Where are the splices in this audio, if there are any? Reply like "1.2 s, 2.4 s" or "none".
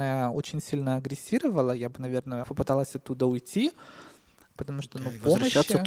2.4 s